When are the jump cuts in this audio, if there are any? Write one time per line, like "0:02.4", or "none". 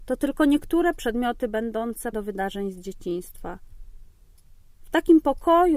0:02.1